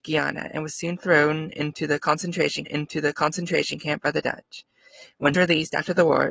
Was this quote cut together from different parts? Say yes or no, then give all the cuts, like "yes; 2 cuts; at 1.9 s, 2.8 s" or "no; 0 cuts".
yes; 2 cuts; at 2.6 s, 5.3 s